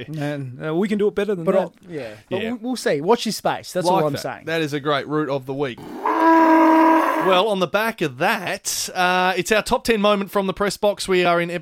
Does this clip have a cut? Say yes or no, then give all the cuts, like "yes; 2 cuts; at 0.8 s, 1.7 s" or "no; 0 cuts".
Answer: no; 0 cuts